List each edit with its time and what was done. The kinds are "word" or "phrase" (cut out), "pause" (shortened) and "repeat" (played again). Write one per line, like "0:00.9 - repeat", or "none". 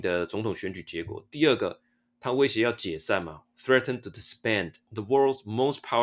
none